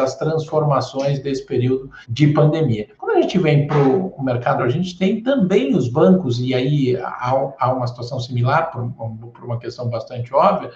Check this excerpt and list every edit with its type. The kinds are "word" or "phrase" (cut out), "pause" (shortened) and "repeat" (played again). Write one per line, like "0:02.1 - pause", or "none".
0:02.0 - pause
0:02.9 - pause
0:04.6 - word